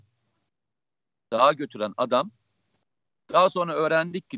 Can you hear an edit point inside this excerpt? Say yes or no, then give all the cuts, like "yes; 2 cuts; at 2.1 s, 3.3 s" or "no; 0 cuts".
no; 0 cuts